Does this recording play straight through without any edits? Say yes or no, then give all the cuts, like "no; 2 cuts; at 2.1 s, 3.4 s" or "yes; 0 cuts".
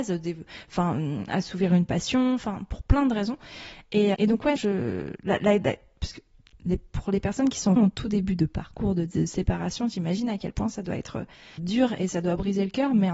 no; 4 cuts; at 4.1 s, 4.6 s, 7.8 s, 11.6 s